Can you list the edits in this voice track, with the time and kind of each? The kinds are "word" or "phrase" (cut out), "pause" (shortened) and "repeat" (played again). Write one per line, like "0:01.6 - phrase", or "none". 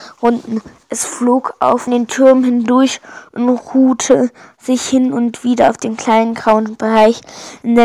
0:01.9 - phrase